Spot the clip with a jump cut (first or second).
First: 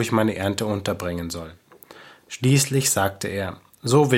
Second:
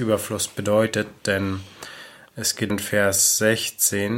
second